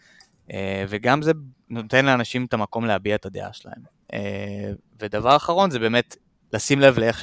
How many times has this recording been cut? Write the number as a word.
zero